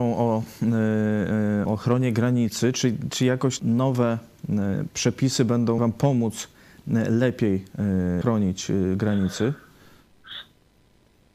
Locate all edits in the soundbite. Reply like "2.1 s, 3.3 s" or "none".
1.7 s, 3.6 s, 5.8 s, 8.2 s